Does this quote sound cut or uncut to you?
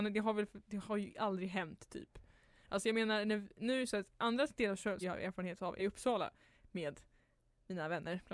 cut